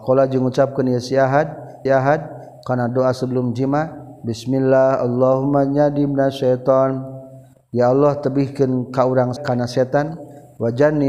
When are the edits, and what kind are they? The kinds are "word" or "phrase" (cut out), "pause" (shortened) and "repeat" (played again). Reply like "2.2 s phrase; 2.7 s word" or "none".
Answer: 1.9 s repeat; 9.4 s word

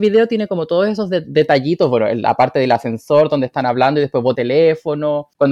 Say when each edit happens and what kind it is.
4.3 s word

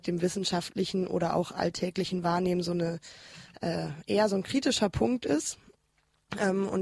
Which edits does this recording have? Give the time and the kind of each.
none

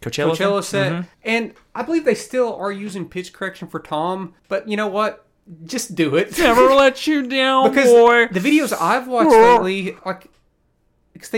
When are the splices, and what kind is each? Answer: 1.1 s pause; 4.4 s pause; 10.0 s pause

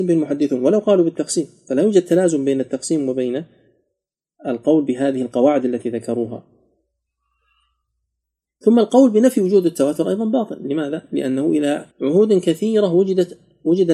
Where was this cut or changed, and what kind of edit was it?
11.9 s pause

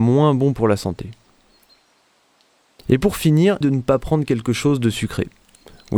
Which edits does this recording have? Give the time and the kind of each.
3.6 s word

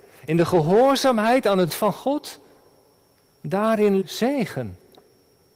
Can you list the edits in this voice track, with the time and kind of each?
1.7 s word; 4.0 s word

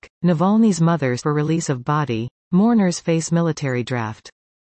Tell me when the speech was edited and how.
1.2 s word

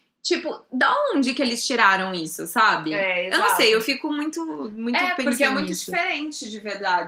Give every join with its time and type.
none

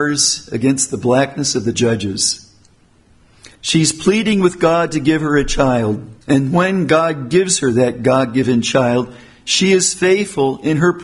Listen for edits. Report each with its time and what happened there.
1.7 s phrase; 3.6 s pause; 6.2 s pause

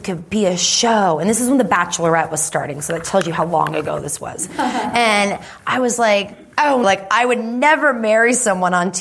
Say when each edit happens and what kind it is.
6.8 s word

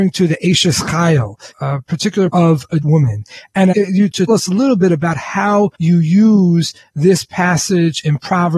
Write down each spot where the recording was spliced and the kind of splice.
1.5 s phrase; 2.3 s word; 2.8 s word; 3.7 s phrase; 4.3 s word; 5.7 s pause

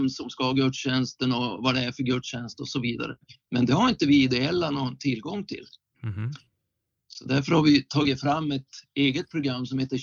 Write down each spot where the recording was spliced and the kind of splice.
none

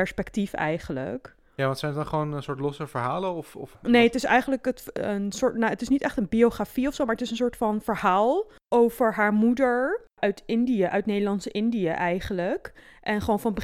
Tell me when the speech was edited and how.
none

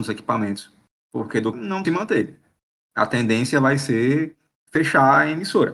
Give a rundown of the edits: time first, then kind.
1.5 s word; 1.8 s phrase

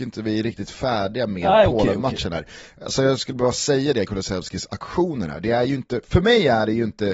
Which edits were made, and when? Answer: 4.1 s word

